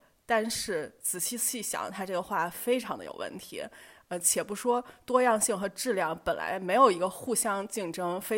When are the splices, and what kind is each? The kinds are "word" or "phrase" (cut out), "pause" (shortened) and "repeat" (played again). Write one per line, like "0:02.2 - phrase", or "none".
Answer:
none